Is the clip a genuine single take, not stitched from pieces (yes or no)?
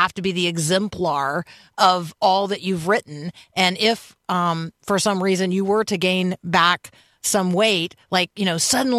yes